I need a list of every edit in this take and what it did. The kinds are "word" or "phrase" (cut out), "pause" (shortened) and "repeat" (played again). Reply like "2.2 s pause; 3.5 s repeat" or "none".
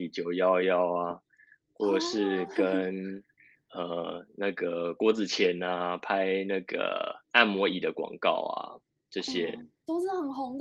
none